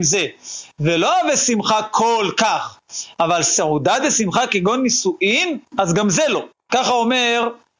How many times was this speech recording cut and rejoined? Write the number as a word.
two